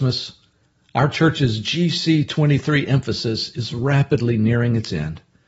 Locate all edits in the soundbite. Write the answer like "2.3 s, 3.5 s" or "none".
none